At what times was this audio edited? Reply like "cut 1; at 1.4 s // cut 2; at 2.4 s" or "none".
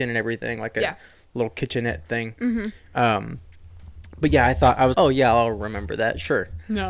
cut 1; at 4.9 s